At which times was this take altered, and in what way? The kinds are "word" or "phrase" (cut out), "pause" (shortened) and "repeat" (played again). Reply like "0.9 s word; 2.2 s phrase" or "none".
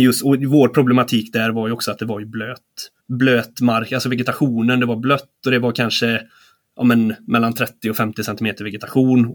3.0 s pause